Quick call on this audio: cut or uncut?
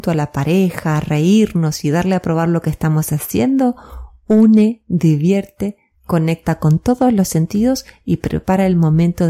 uncut